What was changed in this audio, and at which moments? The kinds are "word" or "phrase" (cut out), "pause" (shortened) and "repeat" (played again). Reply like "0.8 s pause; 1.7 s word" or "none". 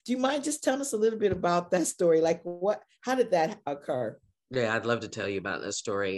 none